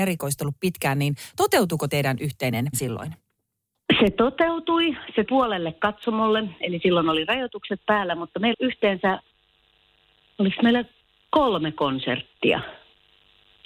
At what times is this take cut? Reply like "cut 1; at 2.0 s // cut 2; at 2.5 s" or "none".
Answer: cut 1; at 1.9 s // cut 2; at 2.7 s // cut 3; at 5.2 s // cut 4; at 8.5 s